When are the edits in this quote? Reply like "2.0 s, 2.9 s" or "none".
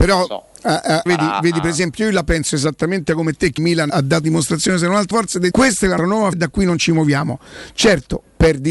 1.1 s, 3.6 s, 3.9 s, 4.2 s, 5.1 s, 5.5 s, 6.0 s, 6.3 s